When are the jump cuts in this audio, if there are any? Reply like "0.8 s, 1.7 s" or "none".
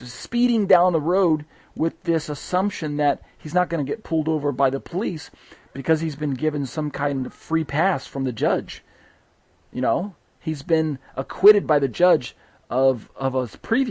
none